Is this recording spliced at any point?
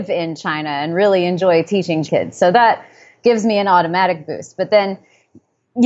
yes; 1 cut; at 2.1 s

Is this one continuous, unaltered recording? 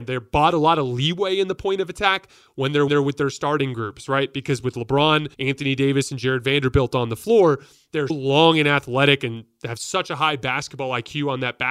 no; 3 cuts; at 2.9 s, 5.3 s, 8.1 s

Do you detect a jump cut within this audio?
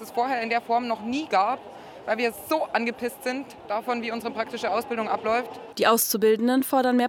no; 0 cuts

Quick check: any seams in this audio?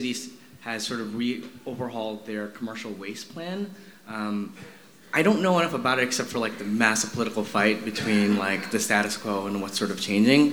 no; 0 cuts

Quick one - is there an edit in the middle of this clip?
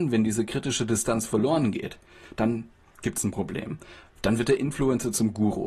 no; 0 cuts

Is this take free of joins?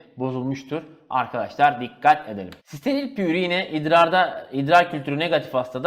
no; 1 cut; at 2.6 s

